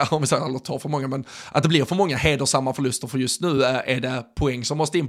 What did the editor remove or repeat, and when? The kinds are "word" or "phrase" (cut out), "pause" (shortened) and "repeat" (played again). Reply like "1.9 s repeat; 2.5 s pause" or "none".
none